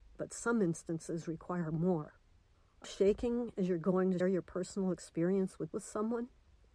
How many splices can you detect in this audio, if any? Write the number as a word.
three